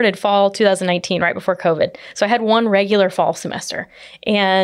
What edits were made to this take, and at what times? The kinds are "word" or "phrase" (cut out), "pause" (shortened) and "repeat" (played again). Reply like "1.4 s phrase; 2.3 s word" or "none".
none